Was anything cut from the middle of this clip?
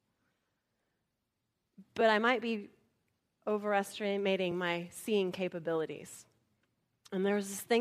no; 0 cuts

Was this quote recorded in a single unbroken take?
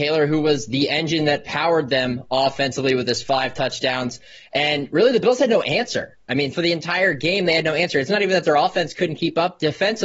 yes; 0 cuts

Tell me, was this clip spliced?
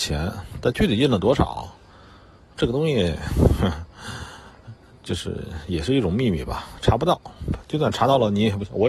no; 0 cuts

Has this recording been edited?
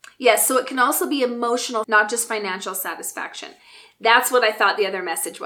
yes; 1 cut; at 1.8 s

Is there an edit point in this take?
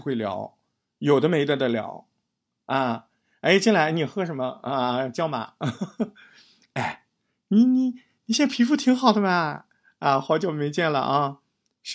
no; 0 cuts

